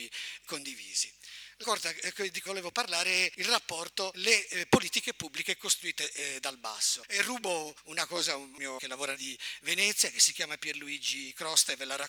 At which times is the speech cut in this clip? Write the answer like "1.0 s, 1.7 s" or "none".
1.6 s, 2.5 s, 4.1 s, 8.8 s, 9.1 s